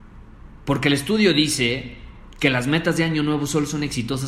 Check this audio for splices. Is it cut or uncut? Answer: uncut